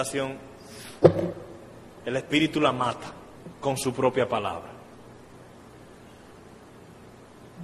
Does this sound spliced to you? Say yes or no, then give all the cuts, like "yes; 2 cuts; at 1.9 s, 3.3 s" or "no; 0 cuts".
no; 0 cuts